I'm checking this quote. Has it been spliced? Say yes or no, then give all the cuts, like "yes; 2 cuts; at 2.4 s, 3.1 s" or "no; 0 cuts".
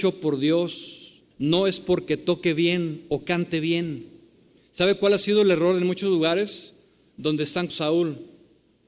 yes; 2 cuts; at 1.3 s, 7.7 s